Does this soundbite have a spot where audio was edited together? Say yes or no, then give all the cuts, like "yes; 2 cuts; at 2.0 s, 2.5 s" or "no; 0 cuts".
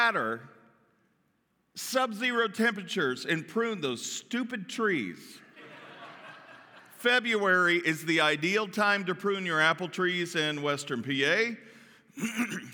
no; 0 cuts